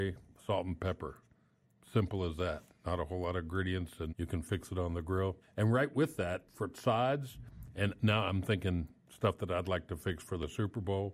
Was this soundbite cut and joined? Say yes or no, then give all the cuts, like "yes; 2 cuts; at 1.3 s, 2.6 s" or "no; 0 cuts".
yes; 2 cuts; at 4.1 s, 5.4 s